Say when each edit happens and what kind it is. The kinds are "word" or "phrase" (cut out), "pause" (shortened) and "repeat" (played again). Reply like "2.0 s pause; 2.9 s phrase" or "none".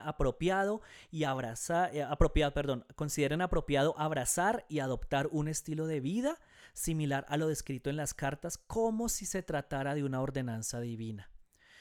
none